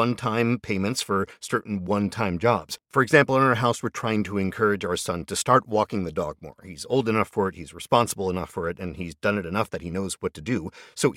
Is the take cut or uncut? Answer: uncut